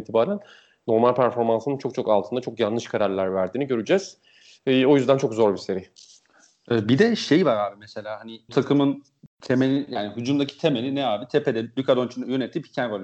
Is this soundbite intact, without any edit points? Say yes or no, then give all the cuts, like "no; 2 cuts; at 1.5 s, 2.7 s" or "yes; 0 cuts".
no; 2 cuts; at 8.5 s, 9.2 s